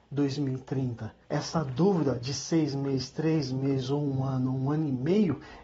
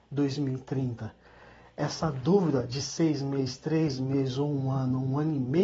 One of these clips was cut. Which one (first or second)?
first